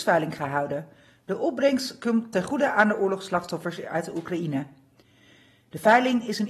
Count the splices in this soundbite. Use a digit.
1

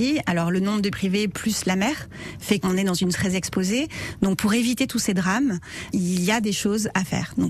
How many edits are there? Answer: 4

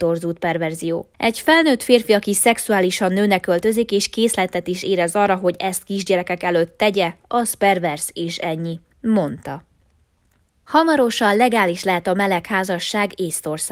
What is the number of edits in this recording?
2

